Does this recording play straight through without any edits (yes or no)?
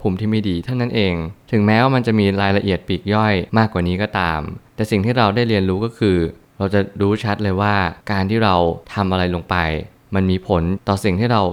no